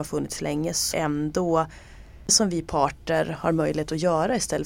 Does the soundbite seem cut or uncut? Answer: cut